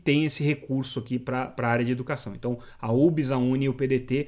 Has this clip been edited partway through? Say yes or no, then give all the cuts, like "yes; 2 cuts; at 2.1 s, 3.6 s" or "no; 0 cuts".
no; 0 cuts